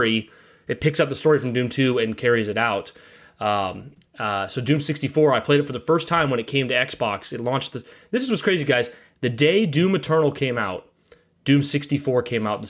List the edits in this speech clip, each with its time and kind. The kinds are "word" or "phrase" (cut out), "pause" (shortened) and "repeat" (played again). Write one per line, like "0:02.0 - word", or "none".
none